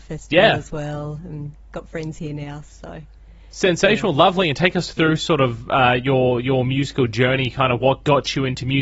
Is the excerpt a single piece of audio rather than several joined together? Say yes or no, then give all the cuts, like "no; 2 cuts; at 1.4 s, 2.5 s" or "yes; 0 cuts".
yes; 0 cuts